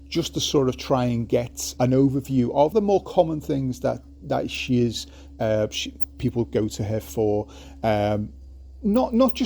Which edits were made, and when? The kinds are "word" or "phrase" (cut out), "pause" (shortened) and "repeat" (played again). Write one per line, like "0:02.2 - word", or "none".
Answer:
0:01.8 - word
0:02.7 - phrase